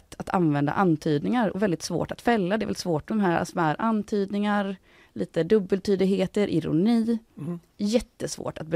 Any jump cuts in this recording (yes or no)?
yes